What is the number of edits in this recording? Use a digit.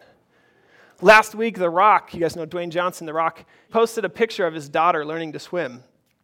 1